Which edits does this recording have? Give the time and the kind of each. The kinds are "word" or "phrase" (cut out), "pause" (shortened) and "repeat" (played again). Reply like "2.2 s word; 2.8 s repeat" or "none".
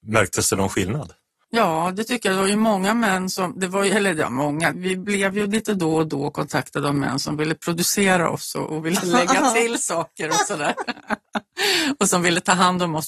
none